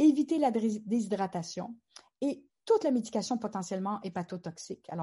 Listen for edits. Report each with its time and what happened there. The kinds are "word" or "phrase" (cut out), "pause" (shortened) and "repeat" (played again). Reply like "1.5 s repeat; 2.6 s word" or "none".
none